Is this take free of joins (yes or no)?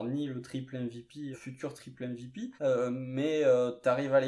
no